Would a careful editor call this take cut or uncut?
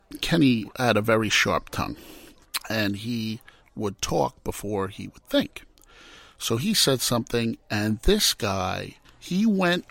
uncut